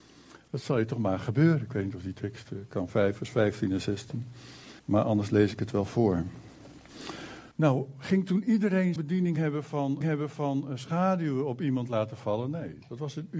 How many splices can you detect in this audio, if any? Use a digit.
5